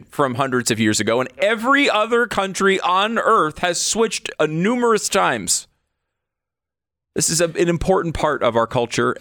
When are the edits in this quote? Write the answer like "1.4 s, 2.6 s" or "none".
none